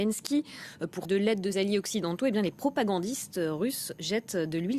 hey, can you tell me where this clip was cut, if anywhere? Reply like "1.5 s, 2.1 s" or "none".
1.0 s, 1.5 s